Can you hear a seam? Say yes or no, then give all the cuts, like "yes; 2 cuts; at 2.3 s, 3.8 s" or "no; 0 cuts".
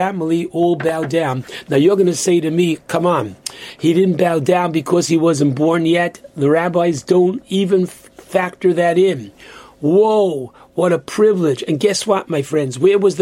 no; 0 cuts